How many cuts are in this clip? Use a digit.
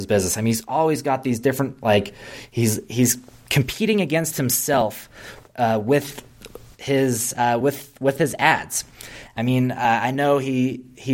0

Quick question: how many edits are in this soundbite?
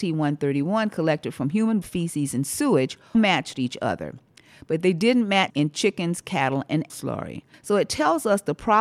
4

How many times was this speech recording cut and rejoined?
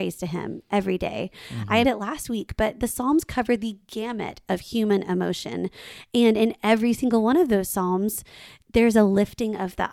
1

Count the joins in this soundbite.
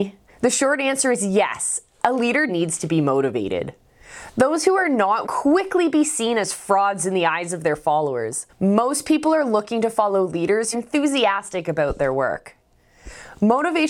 4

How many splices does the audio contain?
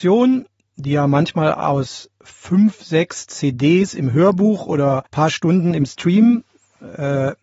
1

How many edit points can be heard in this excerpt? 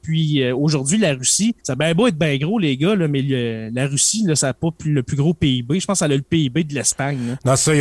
1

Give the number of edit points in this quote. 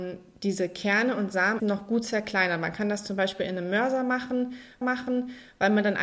2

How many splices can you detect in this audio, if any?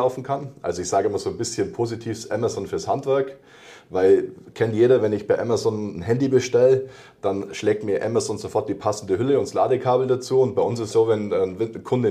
1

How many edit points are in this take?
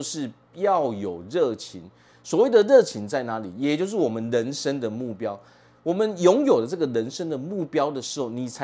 0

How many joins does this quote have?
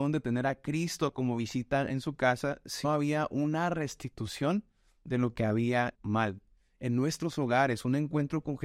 2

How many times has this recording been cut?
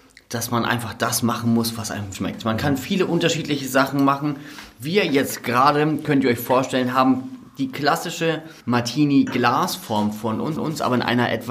3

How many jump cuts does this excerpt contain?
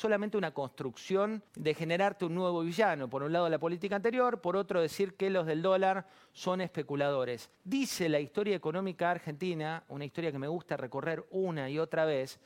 2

